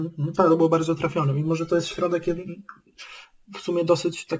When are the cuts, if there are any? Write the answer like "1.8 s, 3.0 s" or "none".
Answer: none